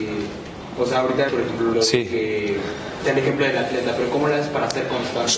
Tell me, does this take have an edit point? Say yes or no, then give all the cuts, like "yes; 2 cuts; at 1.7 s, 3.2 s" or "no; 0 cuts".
yes; 3 cuts; at 1.3 s, 1.7 s, 3.0 s